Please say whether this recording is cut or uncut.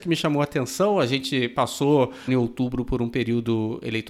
cut